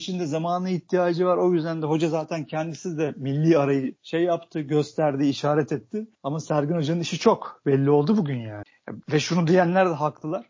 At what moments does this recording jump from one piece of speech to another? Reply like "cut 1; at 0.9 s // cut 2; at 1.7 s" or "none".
cut 1; at 4.0 s // cut 2; at 6.1 s // cut 3; at 9.0 s